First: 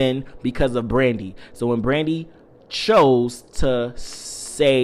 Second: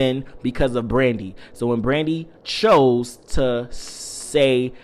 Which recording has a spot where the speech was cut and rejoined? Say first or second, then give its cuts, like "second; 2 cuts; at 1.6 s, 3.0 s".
second; 1 cut; at 2.4 s